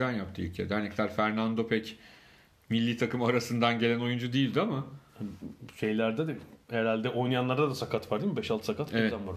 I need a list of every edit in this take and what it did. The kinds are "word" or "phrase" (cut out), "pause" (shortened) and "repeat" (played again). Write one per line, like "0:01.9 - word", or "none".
none